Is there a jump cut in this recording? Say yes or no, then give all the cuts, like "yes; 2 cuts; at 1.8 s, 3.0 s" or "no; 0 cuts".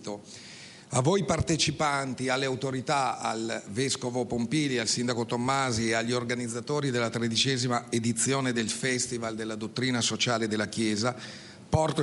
no; 0 cuts